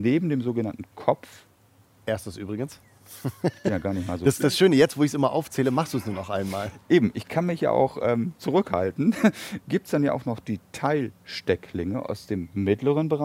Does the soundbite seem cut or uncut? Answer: uncut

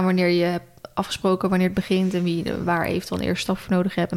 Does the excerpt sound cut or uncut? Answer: uncut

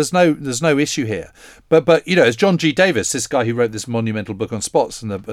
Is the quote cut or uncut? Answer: uncut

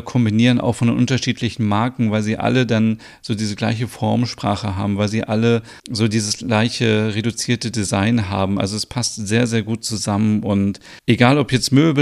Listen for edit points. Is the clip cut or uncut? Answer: cut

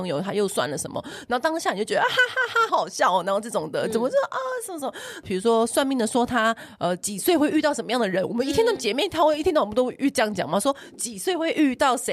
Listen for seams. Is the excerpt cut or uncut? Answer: cut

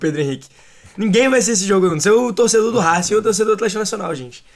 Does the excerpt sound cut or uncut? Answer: uncut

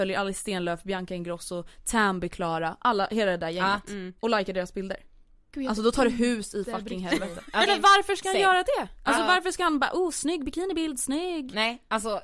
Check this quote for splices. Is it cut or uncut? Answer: cut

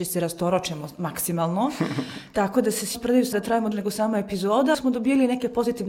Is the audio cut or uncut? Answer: cut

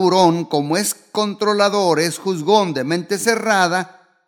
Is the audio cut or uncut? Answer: uncut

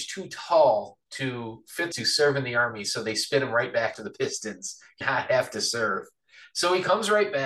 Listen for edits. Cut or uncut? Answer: cut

